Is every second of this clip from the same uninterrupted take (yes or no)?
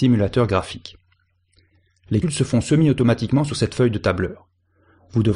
no